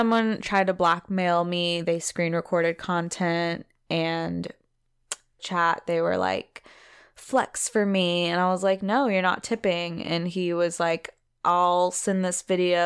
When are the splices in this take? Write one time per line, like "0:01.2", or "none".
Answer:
0:05.4